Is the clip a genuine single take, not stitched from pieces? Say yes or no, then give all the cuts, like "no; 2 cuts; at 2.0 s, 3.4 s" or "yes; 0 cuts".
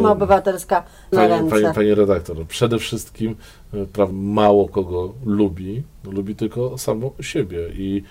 no; 2 cuts; at 1.1 s, 4.1 s